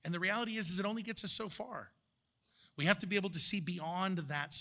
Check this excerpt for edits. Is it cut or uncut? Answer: uncut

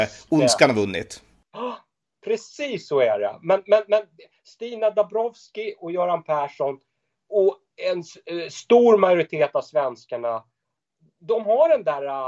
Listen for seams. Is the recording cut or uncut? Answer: uncut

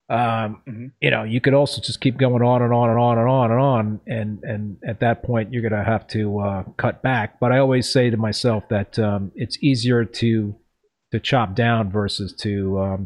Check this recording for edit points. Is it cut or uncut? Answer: uncut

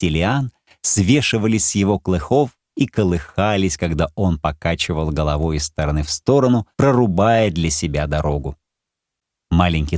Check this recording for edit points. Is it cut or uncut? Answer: cut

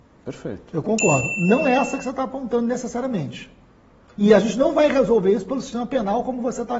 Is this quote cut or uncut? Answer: uncut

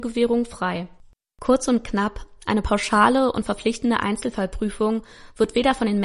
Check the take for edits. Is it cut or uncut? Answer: uncut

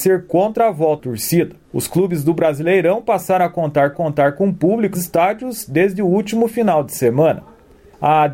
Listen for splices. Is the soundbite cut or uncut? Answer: cut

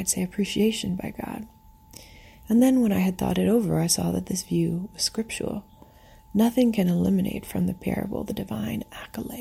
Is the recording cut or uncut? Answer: uncut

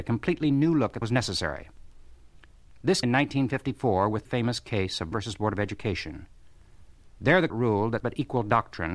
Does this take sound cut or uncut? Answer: cut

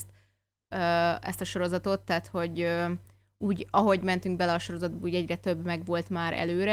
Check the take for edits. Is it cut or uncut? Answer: uncut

